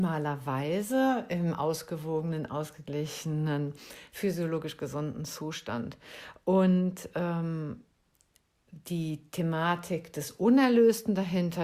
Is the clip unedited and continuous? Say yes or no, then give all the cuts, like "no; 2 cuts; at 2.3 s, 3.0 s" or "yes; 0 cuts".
yes; 0 cuts